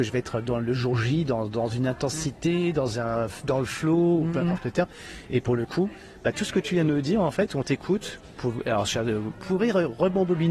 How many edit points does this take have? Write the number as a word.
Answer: zero